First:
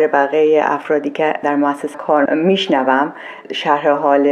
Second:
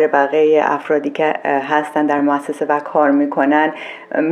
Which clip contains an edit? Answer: first; 3 cuts; at 1.4 s, 1.9 s, 2.3 s

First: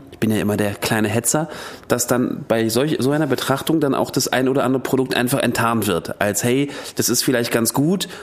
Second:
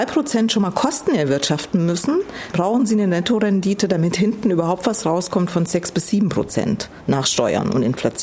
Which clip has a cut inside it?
second; 1 cut; at 2.5 s

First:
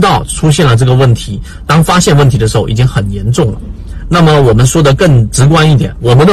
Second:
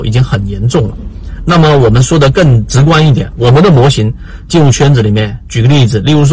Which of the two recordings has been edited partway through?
second; 1 cut; at 4.5 s

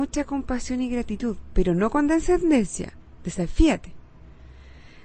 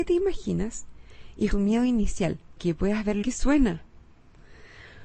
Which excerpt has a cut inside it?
second; 3 cuts; at 1.5 s, 2.6 s, 3.2 s

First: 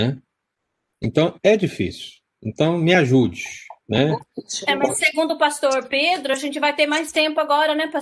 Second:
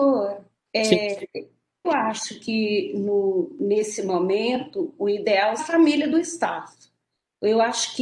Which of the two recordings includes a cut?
second; 2 cuts; at 1.8 s, 5.6 s

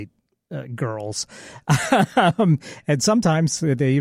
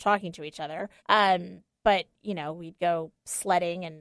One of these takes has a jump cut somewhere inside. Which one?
second; 1 cut; at 1.0 s

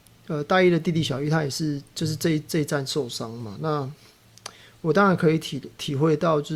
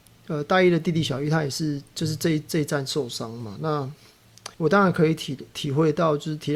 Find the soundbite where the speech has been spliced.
second; 1 cut; at 4.5 s

